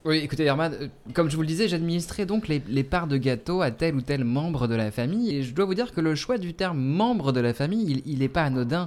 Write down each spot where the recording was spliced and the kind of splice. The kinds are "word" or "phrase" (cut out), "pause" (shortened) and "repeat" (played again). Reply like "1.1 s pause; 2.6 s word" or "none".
5.3 s word